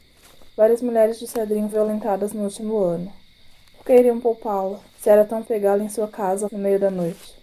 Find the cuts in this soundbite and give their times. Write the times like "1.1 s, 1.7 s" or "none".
1.7 s, 4.9 s, 5.4 s, 6.5 s